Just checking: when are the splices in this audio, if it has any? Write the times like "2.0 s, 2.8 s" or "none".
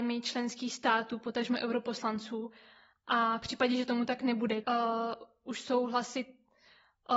4.6 s

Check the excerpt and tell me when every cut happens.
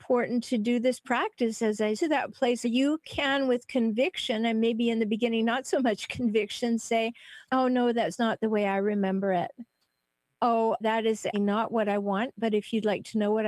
1.9 s, 2.6 s, 7.4 s, 10.8 s, 11.3 s

